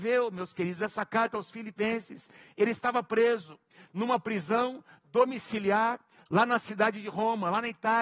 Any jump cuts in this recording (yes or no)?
no